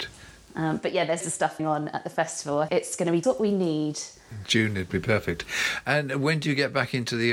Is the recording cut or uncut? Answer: cut